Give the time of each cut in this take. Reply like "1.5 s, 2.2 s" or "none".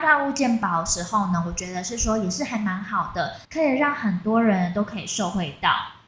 3.4 s